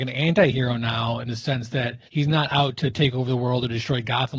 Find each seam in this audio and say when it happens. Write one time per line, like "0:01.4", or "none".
0:02.1